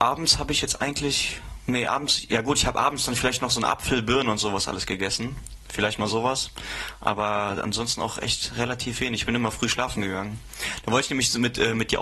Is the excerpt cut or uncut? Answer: uncut